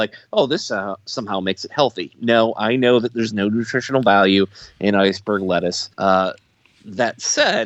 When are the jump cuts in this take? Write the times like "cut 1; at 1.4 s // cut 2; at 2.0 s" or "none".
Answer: cut 1; at 5.9 s

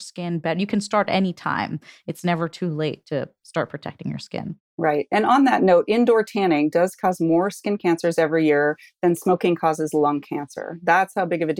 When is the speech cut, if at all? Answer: none

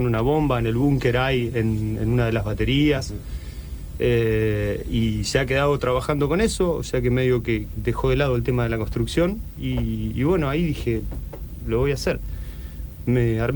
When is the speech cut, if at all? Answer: cut 1; at 7.8 s

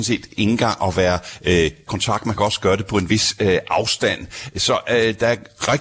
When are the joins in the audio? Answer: cut 1; at 1.9 s

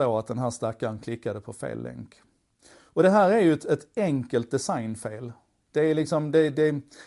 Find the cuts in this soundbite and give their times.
none

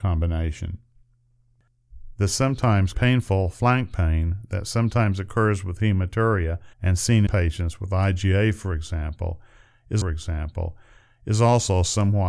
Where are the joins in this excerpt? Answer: cut 1; at 2.9 s // cut 2; at 6.7 s // cut 3; at 7.3 s // cut 4; at 10.0 s

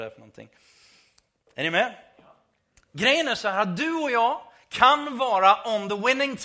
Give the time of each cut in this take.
none

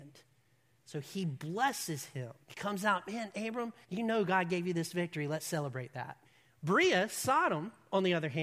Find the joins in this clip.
cut 1; at 2.4 s // cut 2; at 3.8 s // cut 3; at 6.2 s

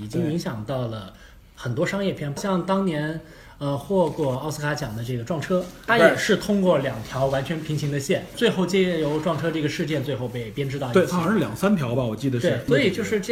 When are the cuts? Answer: none

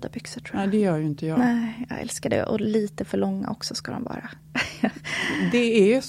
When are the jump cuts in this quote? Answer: none

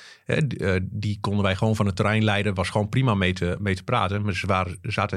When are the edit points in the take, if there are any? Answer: none

